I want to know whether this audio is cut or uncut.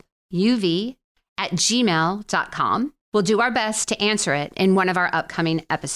uncut